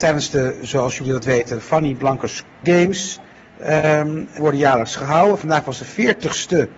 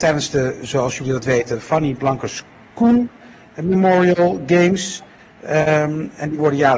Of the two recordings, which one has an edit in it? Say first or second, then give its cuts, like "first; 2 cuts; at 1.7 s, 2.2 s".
first; 2 cuts; at 2.6 s, 4.4 s